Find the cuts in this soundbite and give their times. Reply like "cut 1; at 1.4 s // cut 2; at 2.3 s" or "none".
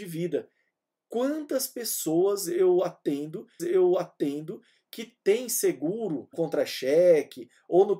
cut 1; at 3.6 s // cut 2; at 6.3 s